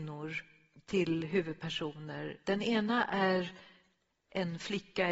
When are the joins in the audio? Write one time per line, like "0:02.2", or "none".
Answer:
none